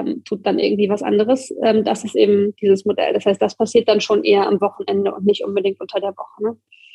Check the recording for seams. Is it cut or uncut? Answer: uncut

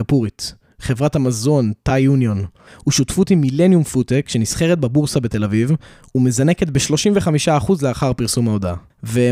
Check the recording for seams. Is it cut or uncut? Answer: uncut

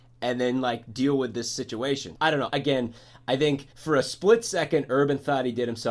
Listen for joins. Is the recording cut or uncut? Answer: cut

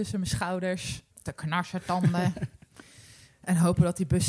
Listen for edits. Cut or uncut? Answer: cut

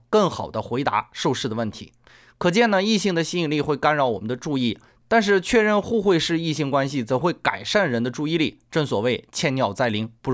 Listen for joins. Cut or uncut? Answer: uncut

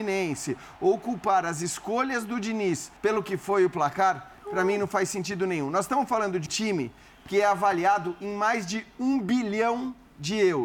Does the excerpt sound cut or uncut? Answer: cut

